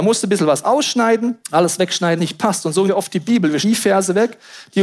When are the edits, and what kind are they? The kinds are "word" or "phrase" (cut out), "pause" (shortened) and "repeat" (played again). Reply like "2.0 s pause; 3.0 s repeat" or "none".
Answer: 1.4 s pause; 2.2 s word; 2.9 s word; 3.6 s word